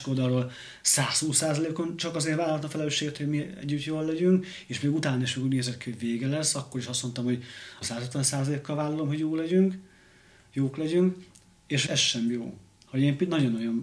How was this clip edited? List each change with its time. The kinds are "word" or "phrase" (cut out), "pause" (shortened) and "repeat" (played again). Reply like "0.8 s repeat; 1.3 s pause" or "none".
7.8 s word; 11.9 s word